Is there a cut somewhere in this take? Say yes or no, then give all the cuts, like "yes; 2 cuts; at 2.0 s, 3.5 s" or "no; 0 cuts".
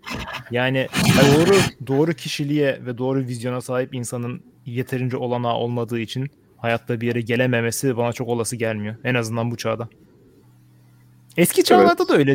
yes; 3 cuts; at 1.8 s, 4.5 s, 6.5 s